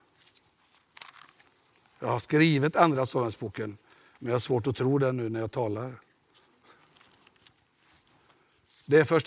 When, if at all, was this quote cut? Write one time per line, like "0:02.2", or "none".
none